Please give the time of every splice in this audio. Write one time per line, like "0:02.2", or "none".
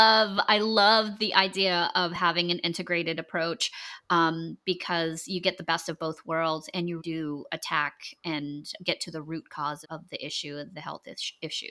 0:07.0
0:09.8